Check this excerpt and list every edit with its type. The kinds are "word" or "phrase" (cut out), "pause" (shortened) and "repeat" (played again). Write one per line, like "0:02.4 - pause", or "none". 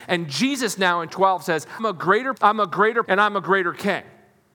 0:01.1 - word
0:01.8 - word
0:02.4 - word
0:03.0 - word